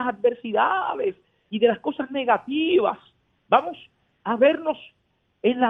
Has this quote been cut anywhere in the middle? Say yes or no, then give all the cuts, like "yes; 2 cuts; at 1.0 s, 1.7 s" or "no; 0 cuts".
no; 0 cuts